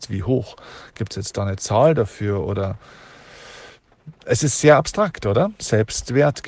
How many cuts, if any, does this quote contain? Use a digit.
0